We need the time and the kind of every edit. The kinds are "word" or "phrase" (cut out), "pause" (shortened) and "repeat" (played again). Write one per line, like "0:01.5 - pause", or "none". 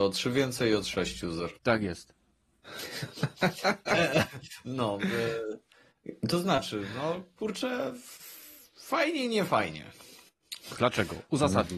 0:01.6 - pause